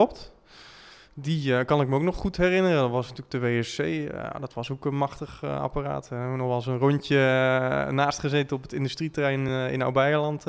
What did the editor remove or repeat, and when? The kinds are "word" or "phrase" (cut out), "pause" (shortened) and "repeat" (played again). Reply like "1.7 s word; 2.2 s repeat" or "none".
none